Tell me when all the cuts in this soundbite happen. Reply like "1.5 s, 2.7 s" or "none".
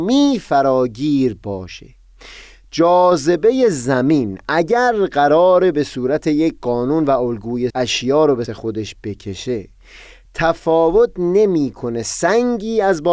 7.7 s, 8.5 s